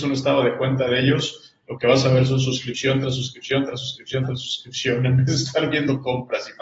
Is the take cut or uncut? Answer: uncut